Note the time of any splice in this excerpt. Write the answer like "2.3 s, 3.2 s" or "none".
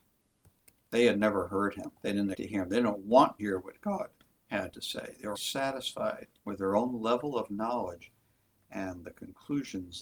2.0 s, 2.3 s, 3.4 s, 5.3 s, 6.4 s